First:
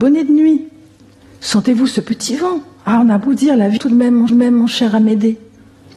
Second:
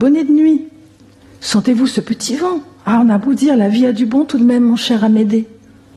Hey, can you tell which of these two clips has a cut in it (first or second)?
first